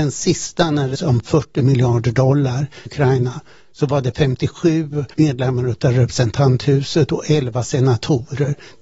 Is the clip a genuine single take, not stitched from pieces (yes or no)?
no